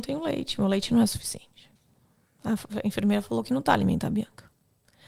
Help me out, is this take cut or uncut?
uncut